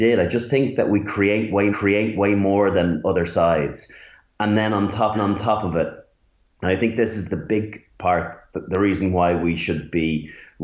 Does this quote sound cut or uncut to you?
cut